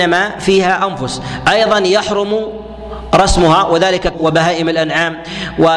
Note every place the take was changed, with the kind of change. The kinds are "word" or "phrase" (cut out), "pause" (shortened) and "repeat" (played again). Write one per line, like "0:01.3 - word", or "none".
0:04.1 - word